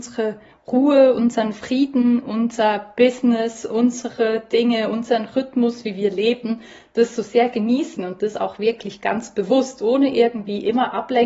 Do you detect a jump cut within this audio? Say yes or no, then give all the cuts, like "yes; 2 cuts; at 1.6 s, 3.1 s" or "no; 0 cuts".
no; 0 cuts